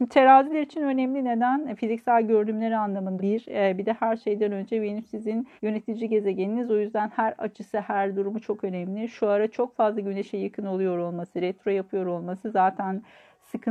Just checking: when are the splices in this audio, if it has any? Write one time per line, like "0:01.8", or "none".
0:03.2
0:05.6